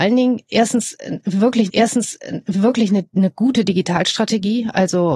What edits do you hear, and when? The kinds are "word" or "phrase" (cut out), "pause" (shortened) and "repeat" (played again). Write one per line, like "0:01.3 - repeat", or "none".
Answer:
0:01.7 - repeat